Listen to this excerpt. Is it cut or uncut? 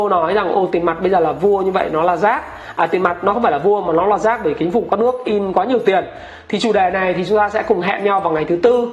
uncut